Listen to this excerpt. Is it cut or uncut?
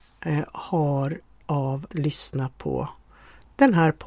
cut